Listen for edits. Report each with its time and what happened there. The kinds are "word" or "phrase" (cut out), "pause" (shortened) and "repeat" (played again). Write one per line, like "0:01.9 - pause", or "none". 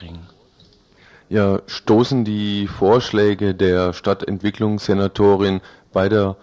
none

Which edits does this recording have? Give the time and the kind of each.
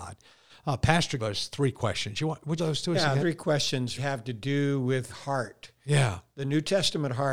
0:01.2 - word
0:02.6 - phrase
0:03.2 - word
0:04.0 - word
0:05.1 - word

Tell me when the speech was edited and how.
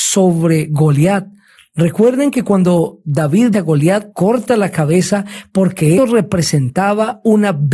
0:03.5 - word
0:04.1 - word
0:06.0 - word

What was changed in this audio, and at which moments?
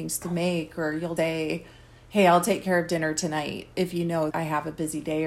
0:01.2 - word
0:04.3 - word

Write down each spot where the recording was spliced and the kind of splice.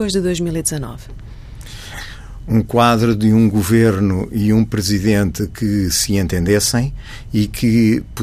none

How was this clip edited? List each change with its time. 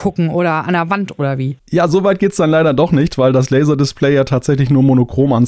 none

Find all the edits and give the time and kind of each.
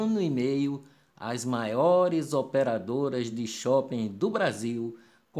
none

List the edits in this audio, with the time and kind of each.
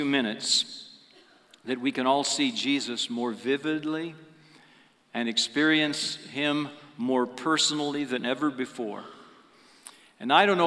none

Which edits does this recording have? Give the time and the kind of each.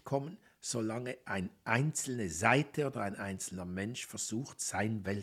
none

